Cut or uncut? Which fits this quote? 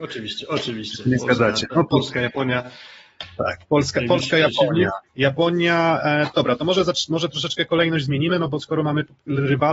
cut